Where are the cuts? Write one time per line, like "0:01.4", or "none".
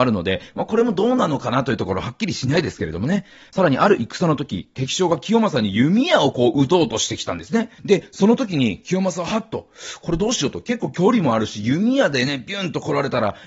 0:07.8